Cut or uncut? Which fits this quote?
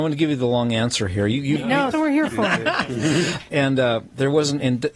cut